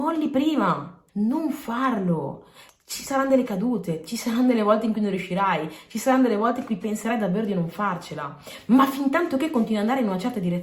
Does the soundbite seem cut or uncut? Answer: cut